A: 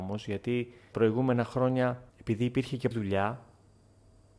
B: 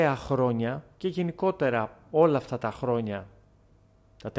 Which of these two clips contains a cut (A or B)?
A